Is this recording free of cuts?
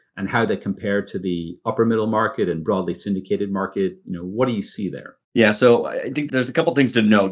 no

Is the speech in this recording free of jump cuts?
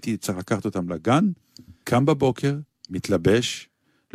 no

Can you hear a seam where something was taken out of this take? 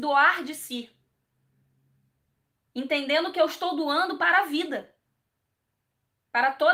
no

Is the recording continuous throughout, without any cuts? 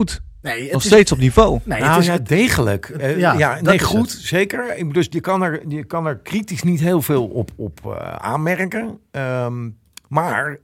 yes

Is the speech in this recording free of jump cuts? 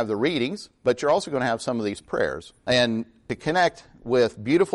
yes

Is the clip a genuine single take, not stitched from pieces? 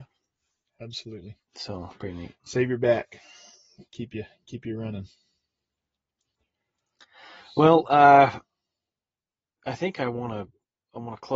no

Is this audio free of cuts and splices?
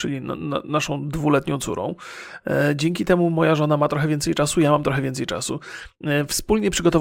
yes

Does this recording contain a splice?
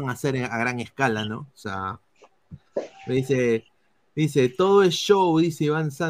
no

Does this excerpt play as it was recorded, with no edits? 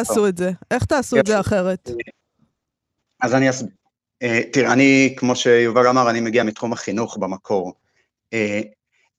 yes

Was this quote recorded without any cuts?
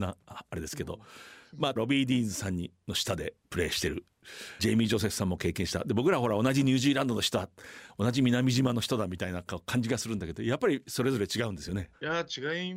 no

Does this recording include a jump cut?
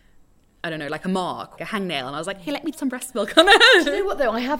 yes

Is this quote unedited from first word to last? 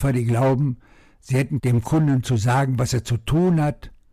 no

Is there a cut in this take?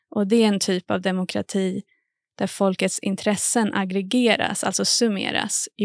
no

